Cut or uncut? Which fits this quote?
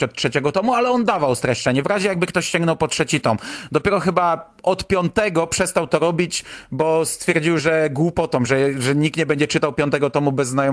uncut